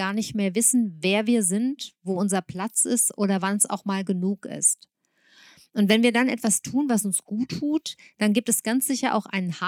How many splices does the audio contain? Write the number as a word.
zero